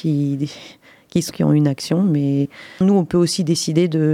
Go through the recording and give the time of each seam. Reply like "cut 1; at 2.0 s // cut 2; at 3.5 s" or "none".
cut 1; at 1.3 s // cut 2; at 2.8 s